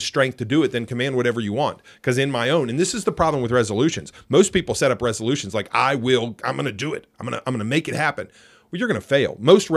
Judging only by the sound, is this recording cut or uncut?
uncut